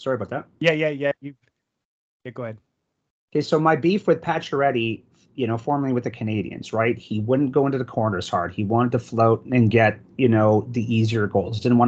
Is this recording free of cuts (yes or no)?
yes